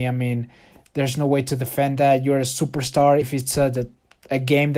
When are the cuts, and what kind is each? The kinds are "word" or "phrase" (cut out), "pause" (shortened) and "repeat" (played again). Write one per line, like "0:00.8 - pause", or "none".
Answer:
0:03.2 - word